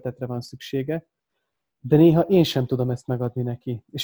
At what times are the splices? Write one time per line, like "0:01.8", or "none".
none

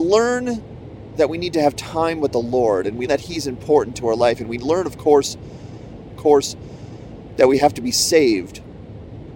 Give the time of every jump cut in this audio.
0:03.1
0:06.2

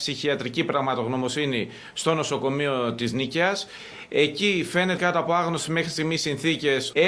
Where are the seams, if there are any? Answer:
0:05.0

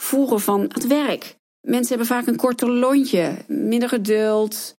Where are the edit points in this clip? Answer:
none

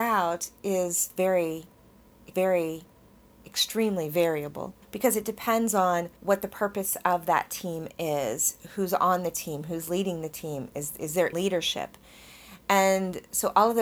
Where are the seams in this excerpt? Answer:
0:02.3
0:04.8
0:06.2
0:11.3

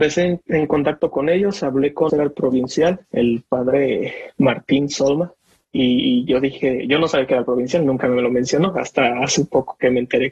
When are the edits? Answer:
0:02.1
0:03.0

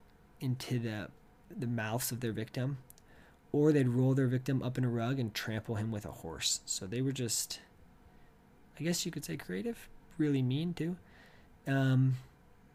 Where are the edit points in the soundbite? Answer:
0:01.3

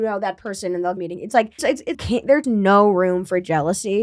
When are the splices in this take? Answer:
0:01.0
0:01.6
0:01.9
0:02.4

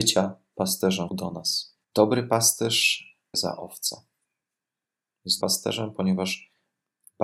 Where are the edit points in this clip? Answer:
0:01.1
0:01.8
0:03.3
0:05.4

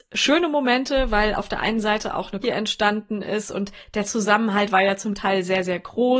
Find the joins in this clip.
0:02.4

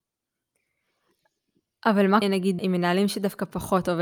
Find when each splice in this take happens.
0:02.2
0:02.6

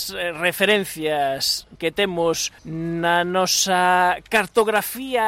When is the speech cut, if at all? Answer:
0:01.8
0:02.6

